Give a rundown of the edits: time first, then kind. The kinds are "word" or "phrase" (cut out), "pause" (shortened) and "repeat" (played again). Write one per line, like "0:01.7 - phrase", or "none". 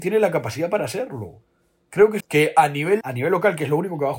0:02.2 - phrase
0:03.0 - word

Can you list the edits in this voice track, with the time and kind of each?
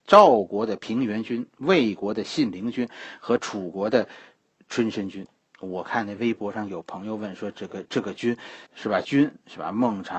0:08.7 - pause

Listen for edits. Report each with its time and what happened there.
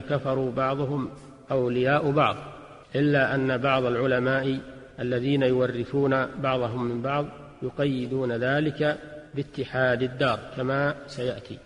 0:02.8 - pause
0:04.9 - pause
0:09.3 - pause

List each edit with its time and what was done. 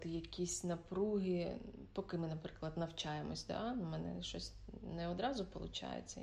none

